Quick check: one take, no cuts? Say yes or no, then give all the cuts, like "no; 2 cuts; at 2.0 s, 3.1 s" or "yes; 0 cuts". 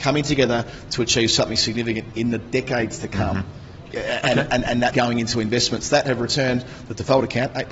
no; 2 cuts; at 3.9 s, 4.9 s